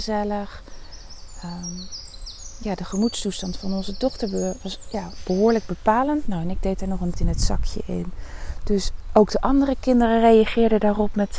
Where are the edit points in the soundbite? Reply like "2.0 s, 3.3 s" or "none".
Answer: 7.1 s